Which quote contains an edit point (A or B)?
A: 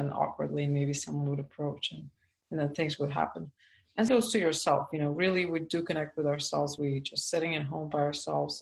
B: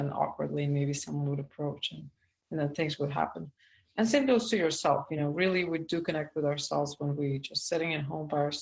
A